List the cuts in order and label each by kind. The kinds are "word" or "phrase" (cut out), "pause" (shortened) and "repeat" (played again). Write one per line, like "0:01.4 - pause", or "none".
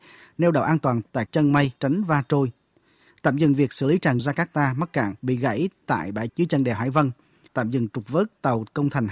0:01.3 - phrase
0:01.8 - pause
0:04.2 - phrase
0:05.2 - pause
0:06.3 - word
0:07.5 - word